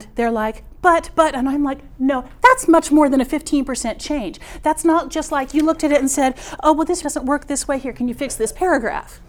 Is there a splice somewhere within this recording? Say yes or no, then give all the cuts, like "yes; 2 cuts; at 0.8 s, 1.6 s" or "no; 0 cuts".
yes; 1 cut; at 7.0 s